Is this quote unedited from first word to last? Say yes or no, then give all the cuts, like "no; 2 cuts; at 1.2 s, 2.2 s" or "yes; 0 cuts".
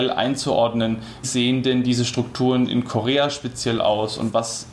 no; 1 cut; at 1.2 s